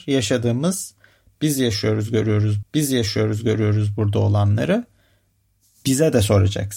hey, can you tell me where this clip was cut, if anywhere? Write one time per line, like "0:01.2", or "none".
0:02.6